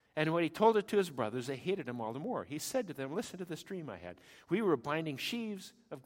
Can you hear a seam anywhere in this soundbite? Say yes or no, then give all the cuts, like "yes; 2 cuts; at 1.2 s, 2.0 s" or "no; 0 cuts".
no; 0 cuts